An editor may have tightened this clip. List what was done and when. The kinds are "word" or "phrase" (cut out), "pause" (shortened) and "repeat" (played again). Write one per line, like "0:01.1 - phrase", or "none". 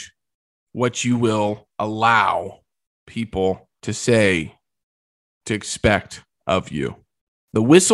none

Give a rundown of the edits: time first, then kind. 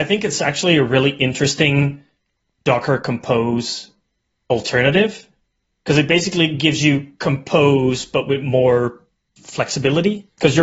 none

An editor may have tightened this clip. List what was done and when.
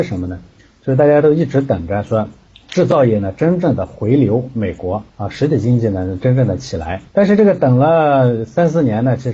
0:02.5 - pause
0:05.1 - pause
0:07.1 - pause

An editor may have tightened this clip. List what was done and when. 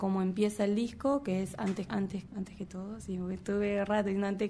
0:01.9 - word
0:02.3 - phrase

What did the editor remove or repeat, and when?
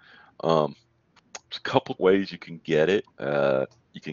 0:02.0 - word
0:03.1 - pause

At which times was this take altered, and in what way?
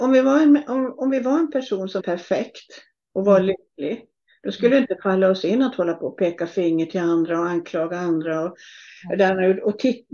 0:02.0 - word

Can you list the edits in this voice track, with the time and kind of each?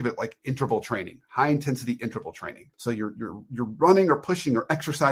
0:02.7 - pause

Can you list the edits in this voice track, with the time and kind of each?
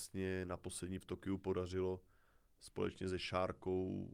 0:01.0 - word

